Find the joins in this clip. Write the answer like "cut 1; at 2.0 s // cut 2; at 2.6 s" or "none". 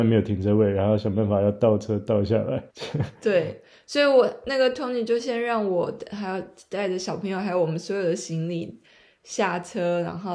cut 1; at 2.7 s